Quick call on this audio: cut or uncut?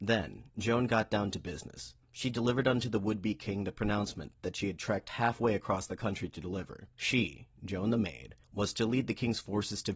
cut